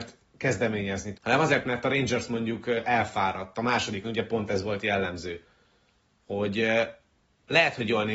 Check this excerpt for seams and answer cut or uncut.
cut